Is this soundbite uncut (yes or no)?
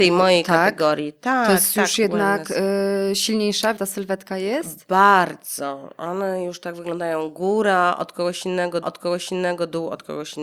no